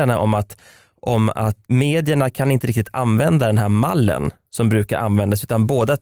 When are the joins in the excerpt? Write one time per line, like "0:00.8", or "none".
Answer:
0:01.6